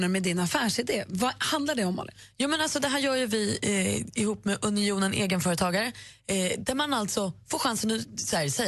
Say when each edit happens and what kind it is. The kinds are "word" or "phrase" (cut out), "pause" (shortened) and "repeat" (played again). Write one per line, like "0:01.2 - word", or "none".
none